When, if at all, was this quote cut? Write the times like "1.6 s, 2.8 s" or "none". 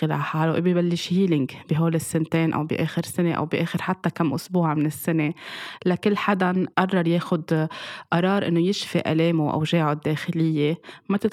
none